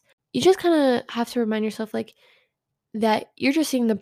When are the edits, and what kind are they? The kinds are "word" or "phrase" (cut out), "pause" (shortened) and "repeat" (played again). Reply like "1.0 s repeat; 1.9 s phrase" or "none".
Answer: none